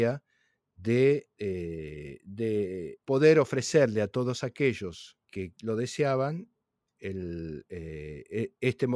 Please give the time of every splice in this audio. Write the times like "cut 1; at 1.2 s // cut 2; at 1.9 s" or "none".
cut 1; at 1.3 s // cut 2; at 3.0 s // cut 3; at 5.2 s

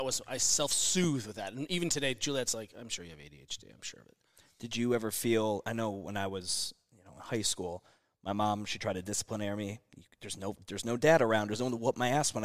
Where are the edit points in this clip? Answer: none

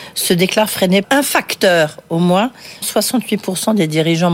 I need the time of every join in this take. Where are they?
cut 1; at 1.0 s // cut 2; at 2.8 s

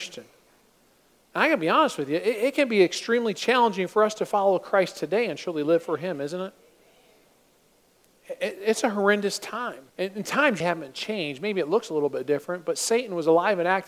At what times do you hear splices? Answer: cut 1; at 9.9 s // cut 2; at 10.6 s

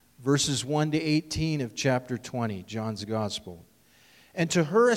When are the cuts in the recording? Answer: none

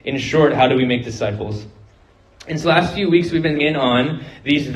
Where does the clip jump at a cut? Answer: cut 1; at 2.6 s // cut 2; at 3.6 s

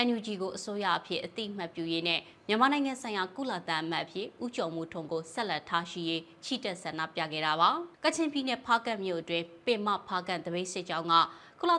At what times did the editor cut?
cut 1; at 7.9 s

